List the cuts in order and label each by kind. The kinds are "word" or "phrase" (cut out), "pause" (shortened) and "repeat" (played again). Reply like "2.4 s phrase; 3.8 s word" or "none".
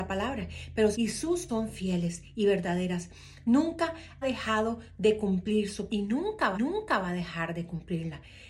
0.9 s phrase; 1.5 s word; 4.2 s word; 5.9 s word; 6.5 s repeat